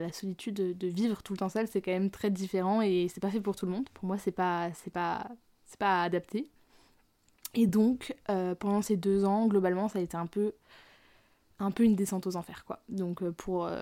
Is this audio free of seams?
yes; 0 cuts

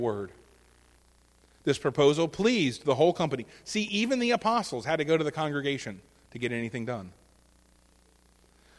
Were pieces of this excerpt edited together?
no; 0 cuts

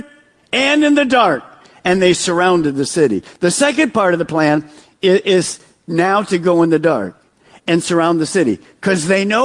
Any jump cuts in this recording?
no; 0 cuts

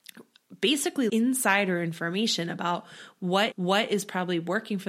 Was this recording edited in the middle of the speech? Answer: yes; 2 cuts; at 1.1 s, 3.5 s

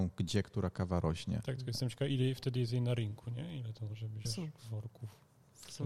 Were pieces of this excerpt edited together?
yes; 2 cuts; at 2.1 s, 4.2 s

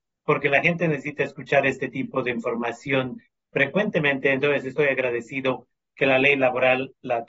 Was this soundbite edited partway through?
no; 0 cuts

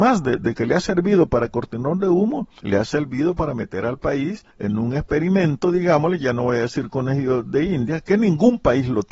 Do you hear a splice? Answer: yes; 2 cuts; at 2.6 s, 4.5 s

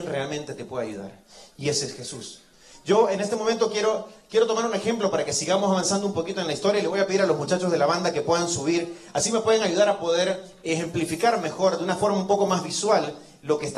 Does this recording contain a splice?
no; 0 cuts

